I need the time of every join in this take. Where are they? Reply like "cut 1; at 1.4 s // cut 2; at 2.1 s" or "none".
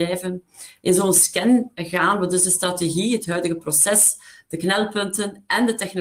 none